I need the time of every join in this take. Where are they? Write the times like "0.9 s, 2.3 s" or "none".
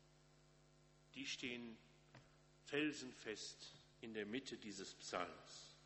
none